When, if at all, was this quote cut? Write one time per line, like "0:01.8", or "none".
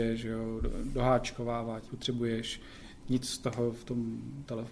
0:01.9